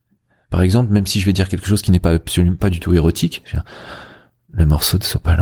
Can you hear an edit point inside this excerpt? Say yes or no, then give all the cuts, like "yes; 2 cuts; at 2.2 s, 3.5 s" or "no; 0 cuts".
no; 0 cuts